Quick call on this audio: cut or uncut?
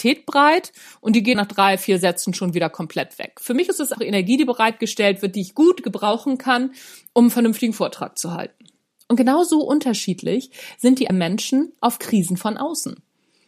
cut